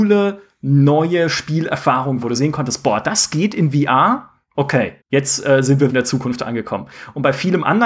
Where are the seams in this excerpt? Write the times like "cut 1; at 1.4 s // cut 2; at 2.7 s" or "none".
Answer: cut 1; at 2.2 s // cut 2; at 5.0 s // cut 3; at 5.9 s